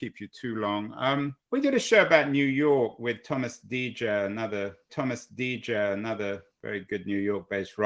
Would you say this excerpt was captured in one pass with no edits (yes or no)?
no